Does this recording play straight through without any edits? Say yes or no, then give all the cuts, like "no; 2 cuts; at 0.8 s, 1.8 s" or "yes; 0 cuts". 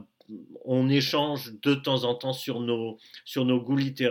yes; 0 cuts